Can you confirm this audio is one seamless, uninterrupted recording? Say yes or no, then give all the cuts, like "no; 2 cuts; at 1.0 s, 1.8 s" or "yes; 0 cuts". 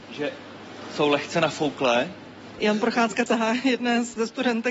no; 1 cut; at 3.3 s